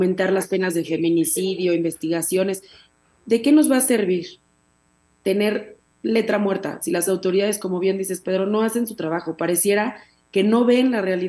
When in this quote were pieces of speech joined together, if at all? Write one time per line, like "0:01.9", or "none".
none